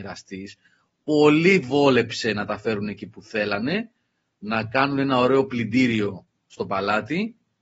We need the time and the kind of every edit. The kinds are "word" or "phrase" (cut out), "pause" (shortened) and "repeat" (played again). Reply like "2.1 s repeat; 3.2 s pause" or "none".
none